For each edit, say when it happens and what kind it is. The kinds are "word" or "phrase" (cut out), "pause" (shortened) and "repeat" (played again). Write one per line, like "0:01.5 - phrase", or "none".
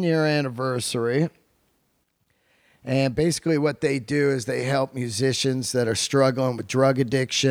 none